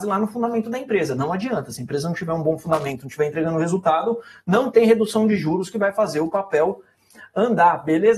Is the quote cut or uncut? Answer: uncut